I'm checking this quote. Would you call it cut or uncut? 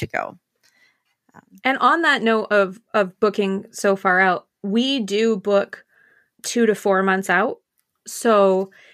uncut